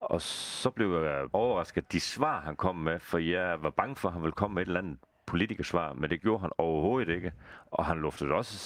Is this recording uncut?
no; 1 cut; at 1.3 s

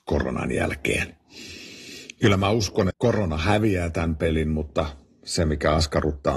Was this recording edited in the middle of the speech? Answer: yes; 1 cut; at 2.9 s

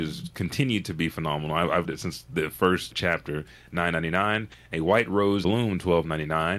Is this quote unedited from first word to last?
no; 3 cuts; at 1.8 s, 2.9 s, 5.4 s

